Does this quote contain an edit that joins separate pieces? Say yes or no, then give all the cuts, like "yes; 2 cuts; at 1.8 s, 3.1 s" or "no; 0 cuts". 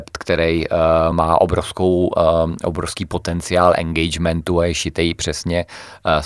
no; 0 cuts